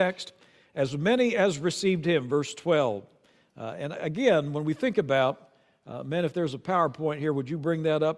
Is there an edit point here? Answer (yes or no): no